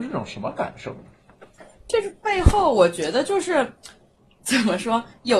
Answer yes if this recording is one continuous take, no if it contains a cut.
yes